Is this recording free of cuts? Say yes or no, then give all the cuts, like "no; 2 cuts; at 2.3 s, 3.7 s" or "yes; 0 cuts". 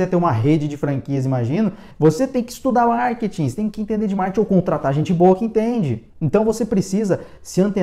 no; 2 cuts; at 1.9 s, 6.1 s